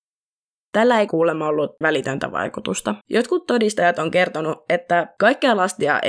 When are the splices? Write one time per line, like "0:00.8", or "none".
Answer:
0:01.1
0:01.8
0:03.0